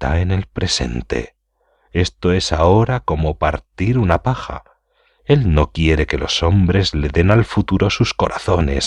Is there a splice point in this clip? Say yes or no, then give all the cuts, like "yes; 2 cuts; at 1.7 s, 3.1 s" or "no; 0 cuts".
no; 0 cuts